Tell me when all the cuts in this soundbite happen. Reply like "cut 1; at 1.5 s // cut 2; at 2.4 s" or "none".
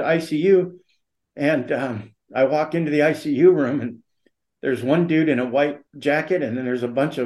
cut 1; at 5.9 s